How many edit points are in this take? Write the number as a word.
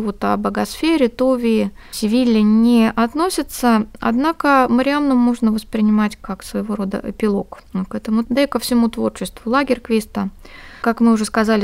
one